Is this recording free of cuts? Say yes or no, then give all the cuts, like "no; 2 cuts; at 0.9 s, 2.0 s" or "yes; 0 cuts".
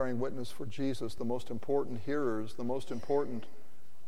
yes; 0 cuts